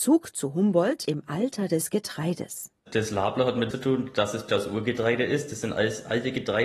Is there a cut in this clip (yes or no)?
yes